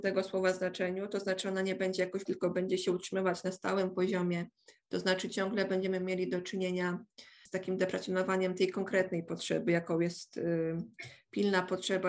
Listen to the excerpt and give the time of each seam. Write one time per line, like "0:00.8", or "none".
0:02.3
0:07.5